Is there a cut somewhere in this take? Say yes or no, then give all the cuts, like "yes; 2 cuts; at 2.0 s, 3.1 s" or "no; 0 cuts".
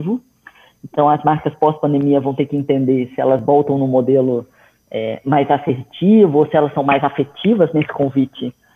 no; 0 cuts